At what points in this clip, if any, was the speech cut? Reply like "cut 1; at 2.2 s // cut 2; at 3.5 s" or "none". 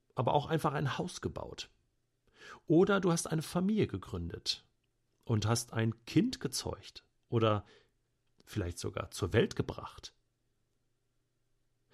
none